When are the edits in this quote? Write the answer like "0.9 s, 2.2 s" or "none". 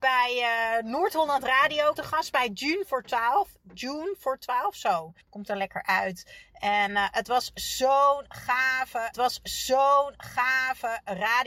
2.0 s, 5.2 s, 9.1 s